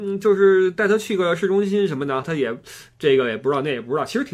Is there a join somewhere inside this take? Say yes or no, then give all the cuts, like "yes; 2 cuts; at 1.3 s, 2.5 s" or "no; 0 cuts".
yes; 1 cut; at 2.2 s